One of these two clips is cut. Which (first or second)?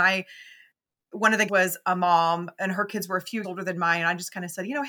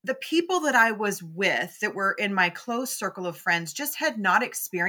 first